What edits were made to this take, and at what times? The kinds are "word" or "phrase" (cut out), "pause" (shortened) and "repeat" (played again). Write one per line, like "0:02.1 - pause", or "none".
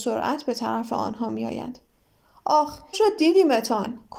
0:02.9 - word